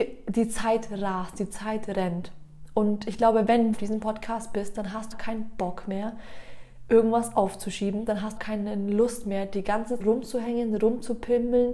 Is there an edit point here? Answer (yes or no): yes